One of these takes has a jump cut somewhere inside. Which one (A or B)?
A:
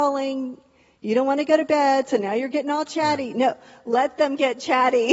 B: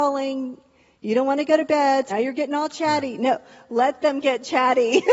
B